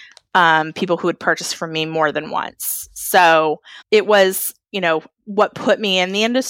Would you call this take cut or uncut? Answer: cut